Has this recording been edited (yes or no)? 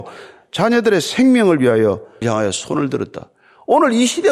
yes